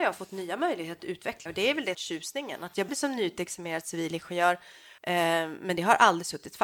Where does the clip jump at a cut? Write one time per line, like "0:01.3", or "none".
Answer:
0:01.0
0:01.5
0:01.9
0:02.9
0:05.0